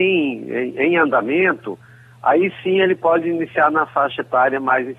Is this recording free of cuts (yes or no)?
yes